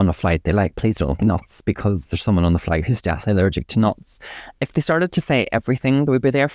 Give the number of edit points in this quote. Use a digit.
1